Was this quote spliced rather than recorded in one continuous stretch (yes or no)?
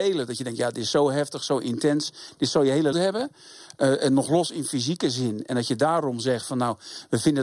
yes